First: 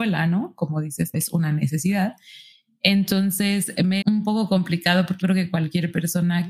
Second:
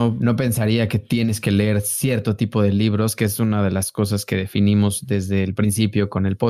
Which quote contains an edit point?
first; 3 cuts; at 1.1 s, 4.0 s, 5.2 s

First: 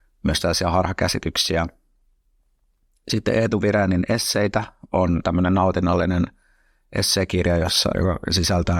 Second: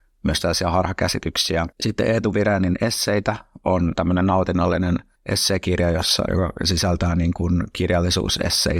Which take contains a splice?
second; 2 cuts; at 1.7 s, 5.2 s

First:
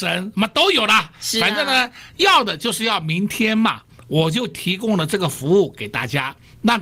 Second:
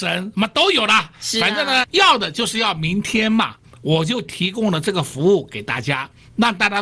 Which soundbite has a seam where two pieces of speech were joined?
second; 1 cut; at 1.8 s

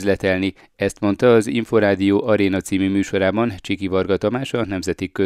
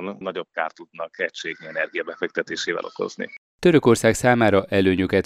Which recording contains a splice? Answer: second; 1 cut; at 3.5 s

